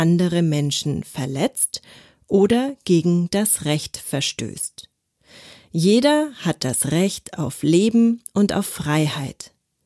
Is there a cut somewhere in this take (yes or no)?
no